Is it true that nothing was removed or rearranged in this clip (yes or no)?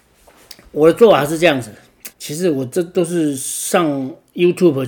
no